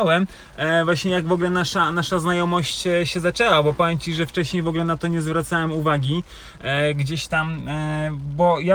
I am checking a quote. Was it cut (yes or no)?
no